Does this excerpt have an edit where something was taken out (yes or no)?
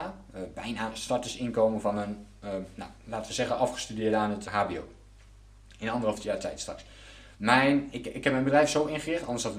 yes